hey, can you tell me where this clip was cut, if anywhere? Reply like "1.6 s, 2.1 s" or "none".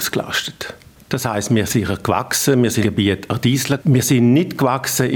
1.7 s, 2.8 s, 3.8 s

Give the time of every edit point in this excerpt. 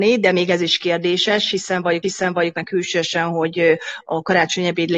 2.0 s

